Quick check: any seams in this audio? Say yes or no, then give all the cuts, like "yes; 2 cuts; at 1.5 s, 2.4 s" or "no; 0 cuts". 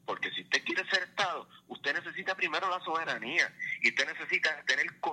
no; 0 cuts